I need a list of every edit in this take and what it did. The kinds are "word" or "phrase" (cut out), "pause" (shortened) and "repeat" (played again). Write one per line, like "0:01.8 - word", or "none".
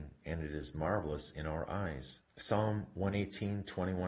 0:02.2 - pause